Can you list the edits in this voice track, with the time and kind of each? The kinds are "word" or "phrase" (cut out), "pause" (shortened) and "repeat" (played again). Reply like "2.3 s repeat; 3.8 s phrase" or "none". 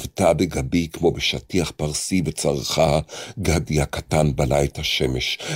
none